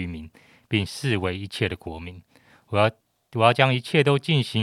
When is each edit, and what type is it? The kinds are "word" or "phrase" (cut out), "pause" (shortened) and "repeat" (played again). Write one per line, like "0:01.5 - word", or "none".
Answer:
none